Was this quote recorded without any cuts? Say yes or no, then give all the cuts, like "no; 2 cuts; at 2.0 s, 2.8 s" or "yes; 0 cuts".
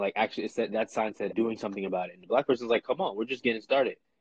no; 1 cut; at 1.3 s